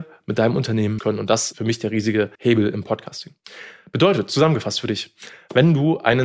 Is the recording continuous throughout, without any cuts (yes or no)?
no